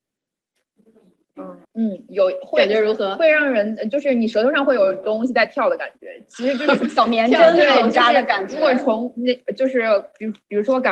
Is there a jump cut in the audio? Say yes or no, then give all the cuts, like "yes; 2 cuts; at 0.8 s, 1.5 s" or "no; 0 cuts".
yes; 1 cut; at 1.6 s